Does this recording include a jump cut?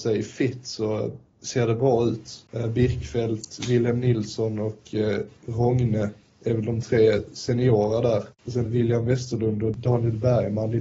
yes; 1 cut; at 8.7 s

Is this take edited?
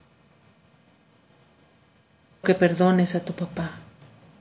yes; 1 cut; at 2.4 s

